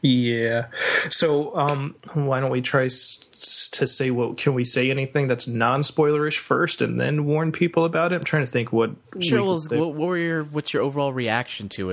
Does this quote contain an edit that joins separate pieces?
no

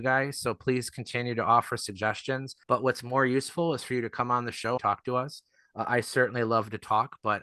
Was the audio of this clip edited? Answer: yes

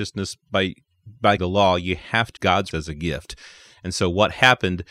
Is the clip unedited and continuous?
no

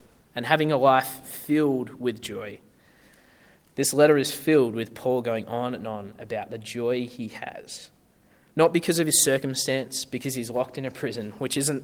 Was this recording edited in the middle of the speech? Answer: no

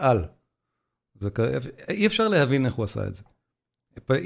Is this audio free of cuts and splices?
yes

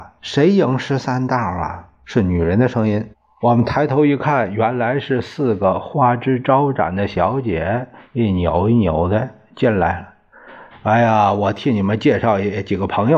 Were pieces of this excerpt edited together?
no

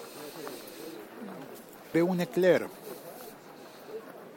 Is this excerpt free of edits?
no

